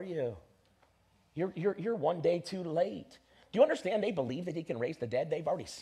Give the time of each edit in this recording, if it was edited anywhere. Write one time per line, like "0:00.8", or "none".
none